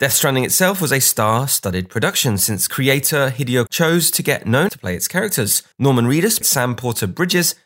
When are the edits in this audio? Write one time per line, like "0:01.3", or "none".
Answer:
0:03.7
0:04.7
0:05.7
0:06.4